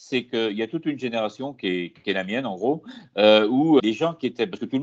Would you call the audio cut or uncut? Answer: cut